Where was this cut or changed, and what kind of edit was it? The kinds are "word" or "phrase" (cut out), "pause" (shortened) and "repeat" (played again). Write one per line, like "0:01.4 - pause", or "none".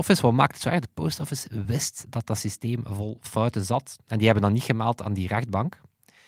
none